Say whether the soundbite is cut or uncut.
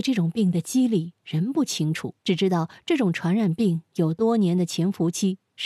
cut